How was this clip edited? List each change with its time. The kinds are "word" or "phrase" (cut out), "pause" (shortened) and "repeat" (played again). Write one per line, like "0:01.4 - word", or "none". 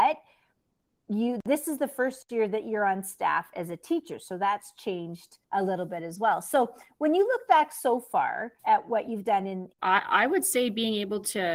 0:05.4 - pause
0:08.6 - pause